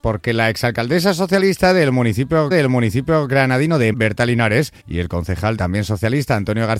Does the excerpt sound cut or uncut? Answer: cut